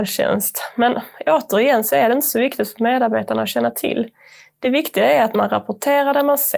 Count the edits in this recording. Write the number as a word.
zero